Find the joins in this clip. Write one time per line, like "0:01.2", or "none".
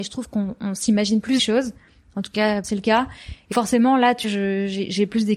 0:01.4
0:02.6
0:03.5
0:04.2